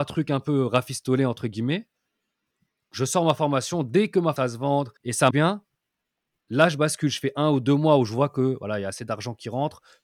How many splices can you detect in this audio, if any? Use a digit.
3